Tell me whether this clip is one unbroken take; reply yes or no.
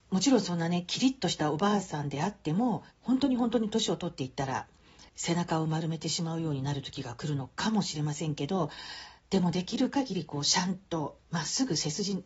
no